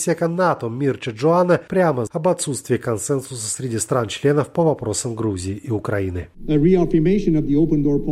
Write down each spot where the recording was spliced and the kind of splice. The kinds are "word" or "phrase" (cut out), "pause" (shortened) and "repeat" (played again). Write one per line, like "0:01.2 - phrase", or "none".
0:02.1 - word